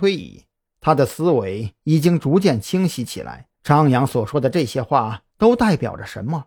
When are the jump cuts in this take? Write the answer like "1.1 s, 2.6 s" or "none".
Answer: 3.5 s